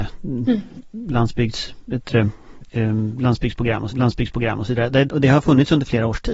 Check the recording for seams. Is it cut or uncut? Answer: cut